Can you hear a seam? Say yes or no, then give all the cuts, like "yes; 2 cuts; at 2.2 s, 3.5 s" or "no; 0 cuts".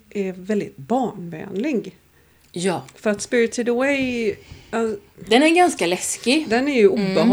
no; 0 cuts